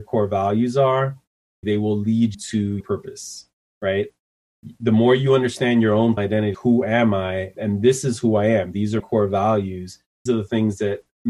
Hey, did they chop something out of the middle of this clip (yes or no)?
yes